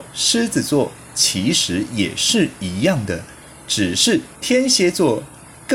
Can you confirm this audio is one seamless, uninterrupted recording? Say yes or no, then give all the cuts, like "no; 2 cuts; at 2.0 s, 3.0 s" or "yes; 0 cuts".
no; 1 cut; at 4.4 s